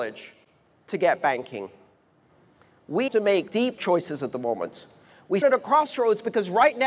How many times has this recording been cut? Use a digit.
4